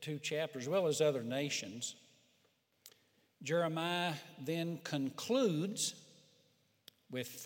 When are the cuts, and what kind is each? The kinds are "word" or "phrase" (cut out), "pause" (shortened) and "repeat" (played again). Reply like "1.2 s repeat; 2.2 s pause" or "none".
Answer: none